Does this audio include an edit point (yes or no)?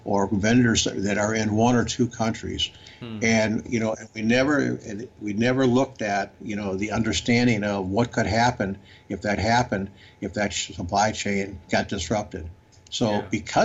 yes